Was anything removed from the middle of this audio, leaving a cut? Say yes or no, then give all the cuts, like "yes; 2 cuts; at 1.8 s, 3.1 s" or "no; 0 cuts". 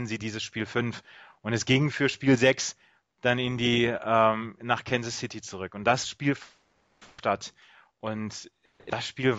no; 0 cuts